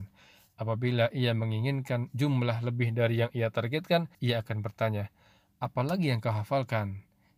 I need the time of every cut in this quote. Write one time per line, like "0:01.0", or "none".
0:04.1

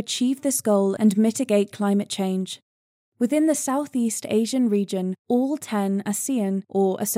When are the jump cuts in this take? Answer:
none

